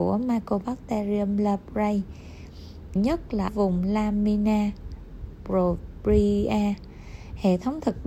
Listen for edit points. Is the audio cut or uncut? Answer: cut